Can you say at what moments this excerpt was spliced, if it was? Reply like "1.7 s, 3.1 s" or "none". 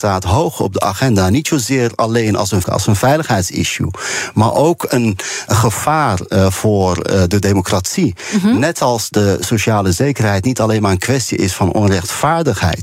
2.6 s